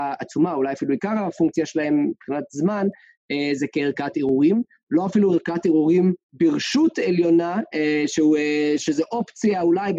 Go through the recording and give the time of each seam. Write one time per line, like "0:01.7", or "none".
0:06.2

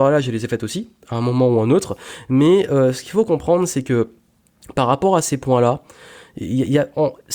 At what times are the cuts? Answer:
none

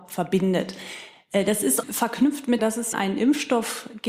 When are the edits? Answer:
0:01.8
0:02.6
0:02.9

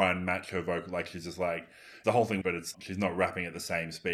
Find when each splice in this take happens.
0:02.0
0:02.4
0:02.7

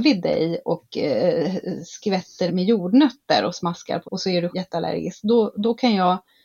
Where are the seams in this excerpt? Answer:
0:02.5
0:04.0
0:04.5

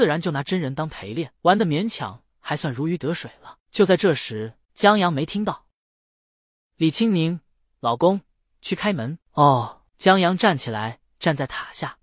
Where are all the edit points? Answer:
0:01.4
0:04.6
0:09.9

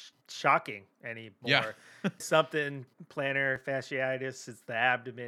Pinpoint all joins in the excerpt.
0:02.2

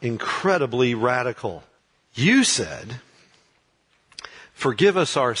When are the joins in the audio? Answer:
0:01.8

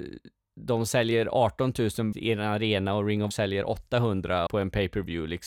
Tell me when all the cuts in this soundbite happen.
0:02.1
0:03.3
0:04.5

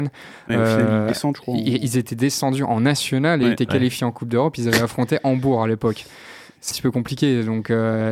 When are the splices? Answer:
0:06.7

